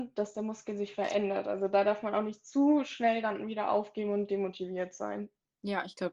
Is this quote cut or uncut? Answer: uncut